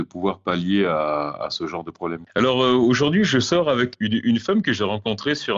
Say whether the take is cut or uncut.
uncut